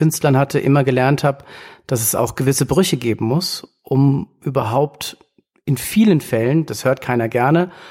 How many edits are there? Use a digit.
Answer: 0